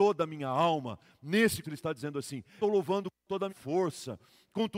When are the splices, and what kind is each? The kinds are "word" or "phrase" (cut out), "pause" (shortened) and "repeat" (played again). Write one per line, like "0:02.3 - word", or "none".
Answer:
0:01.6 - word
0:02.6 - phrase
0:03.5 - word